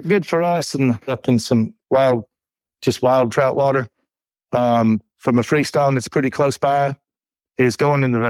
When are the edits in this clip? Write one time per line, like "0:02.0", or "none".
0:01.1